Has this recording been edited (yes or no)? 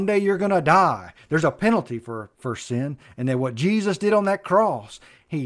yes